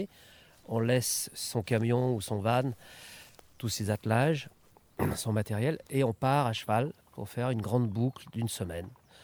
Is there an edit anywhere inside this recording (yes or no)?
no